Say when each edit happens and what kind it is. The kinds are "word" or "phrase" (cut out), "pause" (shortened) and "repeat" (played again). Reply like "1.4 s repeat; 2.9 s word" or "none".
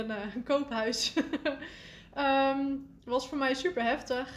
3.0 s pause